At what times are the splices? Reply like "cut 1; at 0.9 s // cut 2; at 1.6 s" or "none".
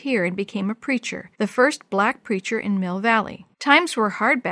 cut 1; at 1.3 s // cut 2; at 3.5 s